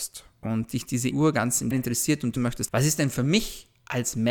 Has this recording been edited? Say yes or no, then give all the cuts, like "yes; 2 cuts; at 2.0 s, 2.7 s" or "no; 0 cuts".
yes; 4 cuts; at 1.1 s, 1.7 s, 2.4 s, 2.7 s